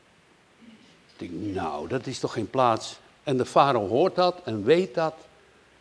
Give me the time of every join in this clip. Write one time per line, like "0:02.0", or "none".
none